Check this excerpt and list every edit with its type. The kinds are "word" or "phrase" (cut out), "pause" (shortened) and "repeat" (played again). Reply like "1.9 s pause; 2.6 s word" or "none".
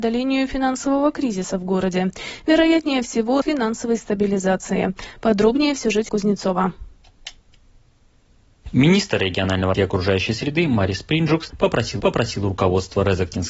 3.4 s phrase; 6.1 s word; 9.7 s word; 12.0 s repeat